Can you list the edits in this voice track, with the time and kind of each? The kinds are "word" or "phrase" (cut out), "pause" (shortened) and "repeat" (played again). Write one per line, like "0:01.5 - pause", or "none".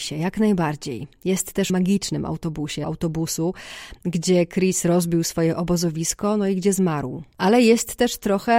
0:01.7 - phrase
0:02.8 - word